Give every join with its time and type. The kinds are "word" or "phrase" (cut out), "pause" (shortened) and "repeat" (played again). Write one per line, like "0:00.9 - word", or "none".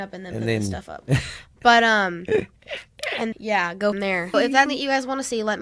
0:03.3 - word
0:03.9 - word
0:04.3 - word
0:04.7 - word